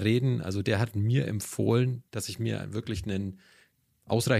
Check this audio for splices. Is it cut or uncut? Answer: cut